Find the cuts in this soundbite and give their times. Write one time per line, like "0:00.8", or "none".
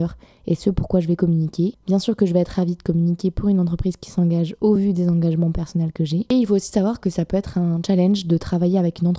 none